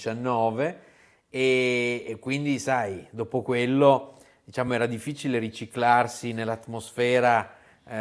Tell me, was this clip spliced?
no; 0 cuts

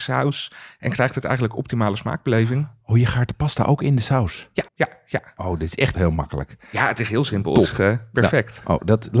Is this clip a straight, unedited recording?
no; 2 cuts; at 4.7 s, 5.9 s

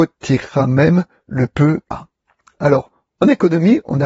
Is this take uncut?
no; 1 cut; at 1.9 s

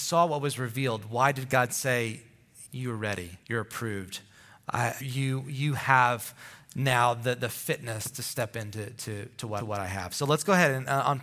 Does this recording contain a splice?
yes; 4 cuts; at 2.7 s, 3.4 s, 5.0 s, 9.6 s

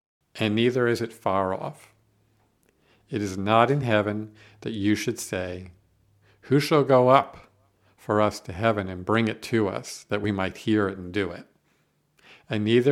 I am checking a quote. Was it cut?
no; 0 cuts

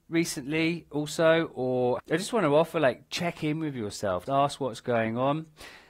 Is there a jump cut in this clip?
yes; 2 cuts; at 2.0 s, 4.3 s

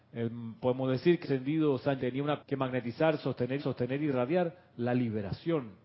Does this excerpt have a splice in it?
yes; 4 cuts; at 1.2 s, 2.0 s, 2.4 s, 3.6 s

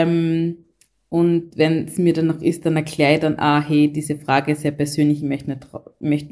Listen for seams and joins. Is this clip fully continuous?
yes; 0 cuts

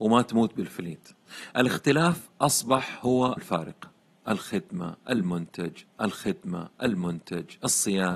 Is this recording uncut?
no; 3 cuts; at 1.5 s, 3.4 s, 5.9 s

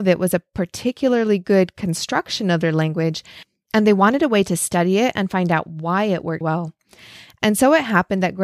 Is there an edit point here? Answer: yes; 1 cut; at 6.4 s

